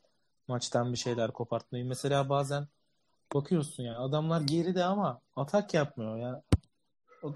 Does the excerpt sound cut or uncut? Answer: uncut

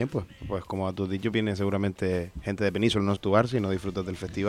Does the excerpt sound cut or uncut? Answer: cut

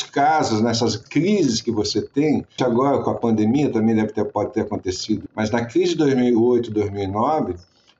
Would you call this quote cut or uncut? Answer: cut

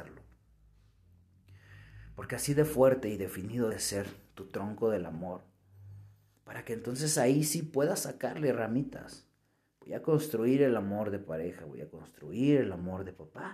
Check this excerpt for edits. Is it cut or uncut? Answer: cut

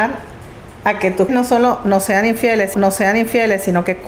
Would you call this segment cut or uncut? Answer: cut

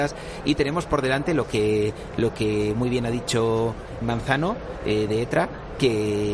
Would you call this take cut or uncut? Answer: cut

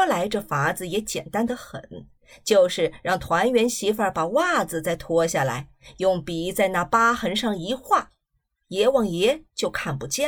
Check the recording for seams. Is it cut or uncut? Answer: uncut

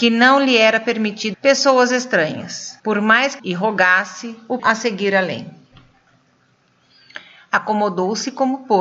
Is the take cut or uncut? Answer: cut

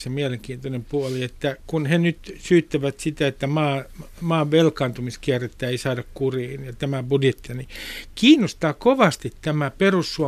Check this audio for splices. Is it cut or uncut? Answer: cut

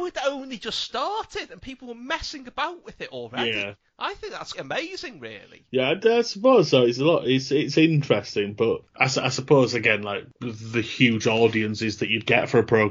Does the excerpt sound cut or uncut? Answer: cut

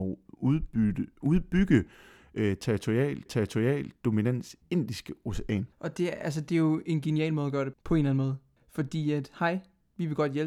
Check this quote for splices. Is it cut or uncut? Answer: cut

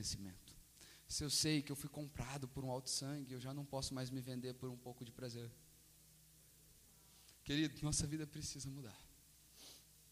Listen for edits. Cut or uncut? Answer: uncut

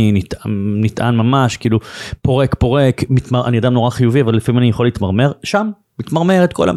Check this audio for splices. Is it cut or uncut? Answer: uncut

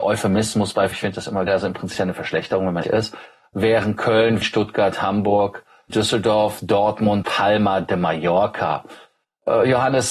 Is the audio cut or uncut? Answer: cut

